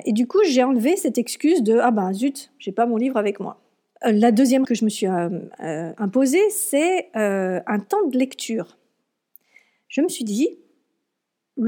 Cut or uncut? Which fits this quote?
cut